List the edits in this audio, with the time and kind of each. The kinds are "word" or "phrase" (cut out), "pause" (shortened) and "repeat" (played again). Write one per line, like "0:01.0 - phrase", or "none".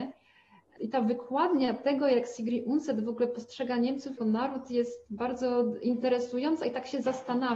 0:04.2 - word